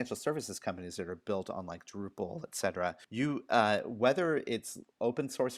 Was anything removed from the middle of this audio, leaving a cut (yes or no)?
yes